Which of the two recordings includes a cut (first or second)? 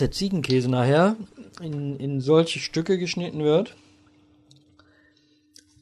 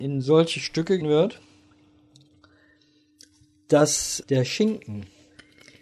second